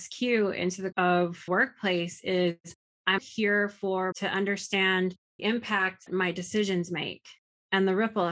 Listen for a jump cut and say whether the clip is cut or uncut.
cut